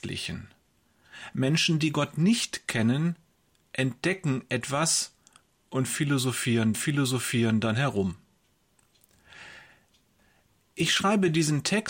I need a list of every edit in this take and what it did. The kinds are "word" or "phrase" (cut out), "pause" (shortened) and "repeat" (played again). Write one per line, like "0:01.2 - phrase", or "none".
0:06.7 - repeat